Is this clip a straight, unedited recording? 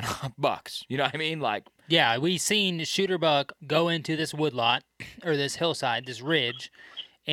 no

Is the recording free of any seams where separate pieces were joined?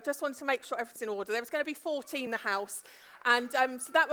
no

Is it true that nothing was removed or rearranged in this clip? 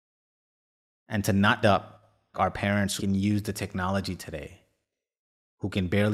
no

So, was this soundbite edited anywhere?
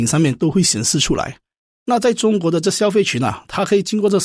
no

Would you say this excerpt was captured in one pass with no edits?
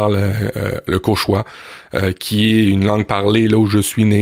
yes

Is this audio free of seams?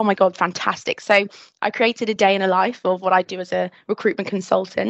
yes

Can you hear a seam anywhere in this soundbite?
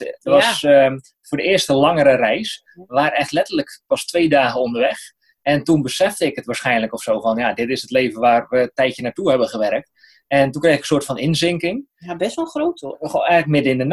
no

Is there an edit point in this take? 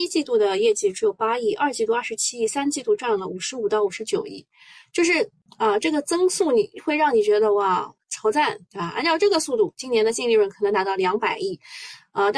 no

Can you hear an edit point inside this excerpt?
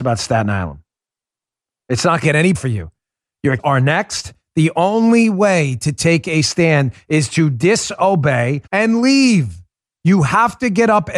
yes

